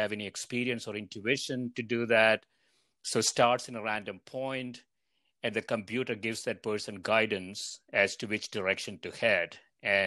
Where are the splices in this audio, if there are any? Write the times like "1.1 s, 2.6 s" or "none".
none

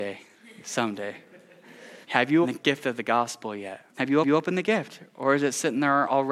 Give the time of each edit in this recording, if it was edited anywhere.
2.0 s, 2.4 s, 3.9 s, 4.2 s

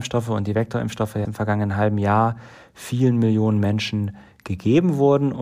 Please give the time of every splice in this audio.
1.2 s

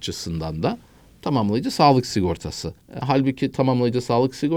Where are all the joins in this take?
2.8 s

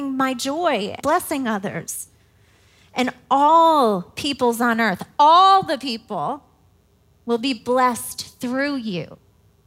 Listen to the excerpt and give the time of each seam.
1.0 s

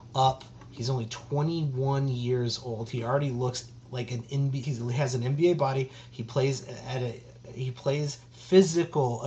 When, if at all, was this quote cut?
4.6 s

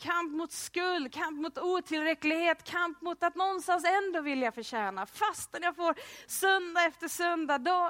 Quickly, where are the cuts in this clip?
1.1 s

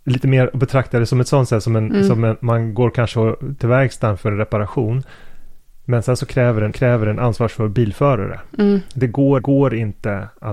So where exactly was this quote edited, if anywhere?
3.6 s, 6.7 s, 9.4 s

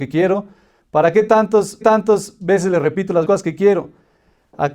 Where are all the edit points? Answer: 1.8 s, 3.2 s

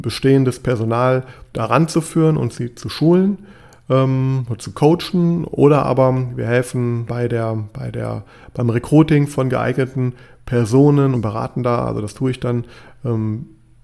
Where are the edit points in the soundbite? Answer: 1.5 s, 7.1 s, 11.1 s

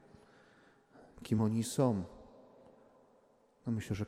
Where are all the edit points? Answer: none

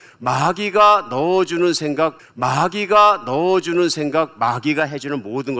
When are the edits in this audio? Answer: 2.2 s

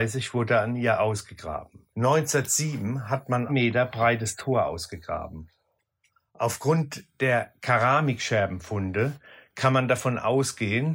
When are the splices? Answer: 1.9 s, 3.5 s, 7.1 s

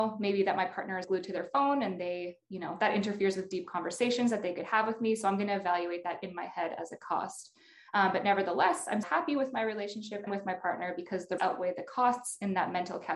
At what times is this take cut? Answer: 1.0 s, 9.0 s, 10.3 s, 11.4 s

